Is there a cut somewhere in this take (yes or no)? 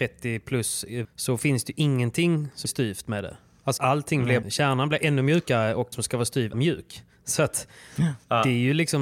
yes